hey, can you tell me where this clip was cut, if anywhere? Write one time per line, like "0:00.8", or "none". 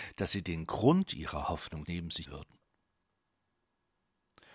0:01.8
0:02.2